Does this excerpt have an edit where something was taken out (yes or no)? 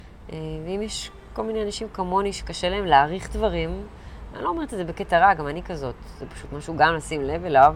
no